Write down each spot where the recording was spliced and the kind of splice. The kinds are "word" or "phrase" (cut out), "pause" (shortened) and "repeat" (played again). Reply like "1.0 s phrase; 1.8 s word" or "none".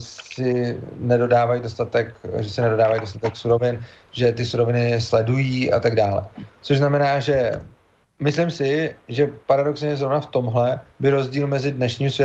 8.0 s pause; 9.4 s pause; 10.9 s pause

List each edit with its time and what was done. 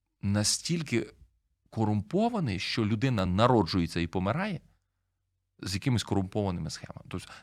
none

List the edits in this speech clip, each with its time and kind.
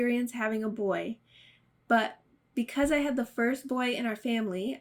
none

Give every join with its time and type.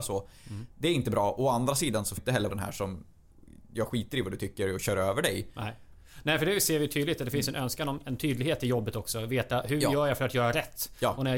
2.2 s phrase; 2.5 s word

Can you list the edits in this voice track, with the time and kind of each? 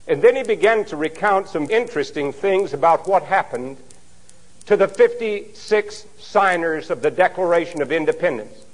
1.7 s word

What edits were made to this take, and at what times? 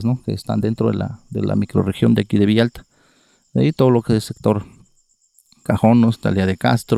none

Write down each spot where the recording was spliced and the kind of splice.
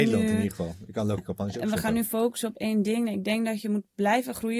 1.2 s word

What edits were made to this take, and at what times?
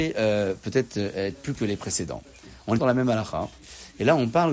1.5 s word; 2.8 s word

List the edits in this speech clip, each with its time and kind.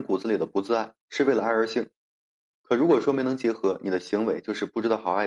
1.0 s pause

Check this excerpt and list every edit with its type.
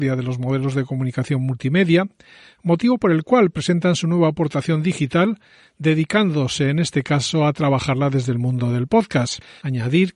none

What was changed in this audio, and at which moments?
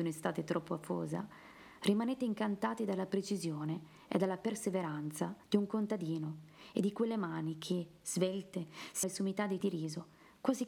5.4 s pause; 9.0 s word; 9.6 s word

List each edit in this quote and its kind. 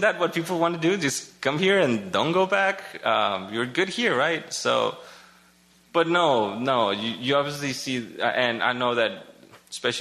none

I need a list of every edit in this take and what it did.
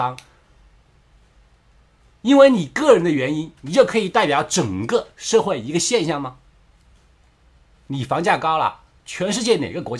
3.6 s pause

